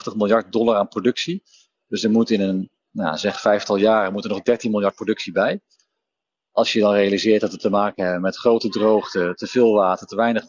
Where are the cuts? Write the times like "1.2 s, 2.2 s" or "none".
none